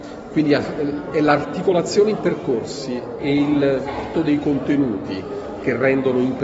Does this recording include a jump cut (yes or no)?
yes